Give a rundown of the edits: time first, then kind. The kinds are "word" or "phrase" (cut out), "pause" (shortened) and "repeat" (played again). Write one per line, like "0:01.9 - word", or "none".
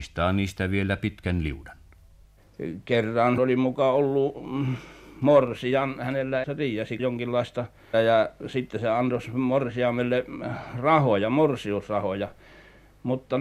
0:03.4 - word
0:06.4 - word
0:07.0 - word
0:07.9 - word